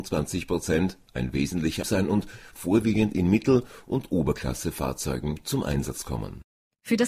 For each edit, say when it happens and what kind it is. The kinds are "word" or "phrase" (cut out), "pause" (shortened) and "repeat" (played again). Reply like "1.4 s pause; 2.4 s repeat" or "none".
1.8 s word